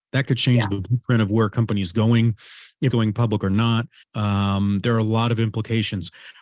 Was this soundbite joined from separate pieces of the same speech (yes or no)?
yes